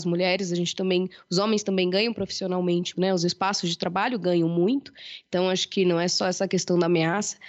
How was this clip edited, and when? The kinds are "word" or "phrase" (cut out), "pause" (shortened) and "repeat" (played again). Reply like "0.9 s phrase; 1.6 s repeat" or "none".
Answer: 2.9 s word